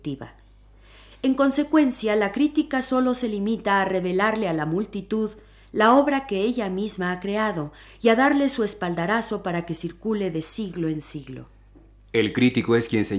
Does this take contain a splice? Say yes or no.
no